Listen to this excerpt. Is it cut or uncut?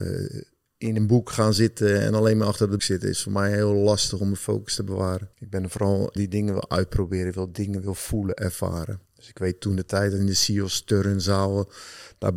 cut